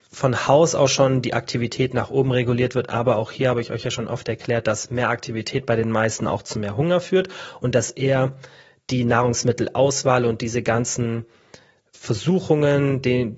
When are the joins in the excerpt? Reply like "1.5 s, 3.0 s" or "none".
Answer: none